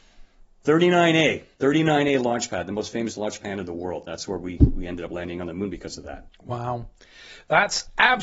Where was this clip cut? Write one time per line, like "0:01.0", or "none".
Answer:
0:01.5
0:06.3